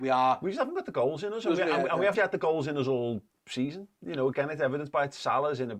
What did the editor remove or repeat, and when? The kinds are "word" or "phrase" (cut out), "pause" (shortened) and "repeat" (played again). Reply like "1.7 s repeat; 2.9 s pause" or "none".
2.1 s word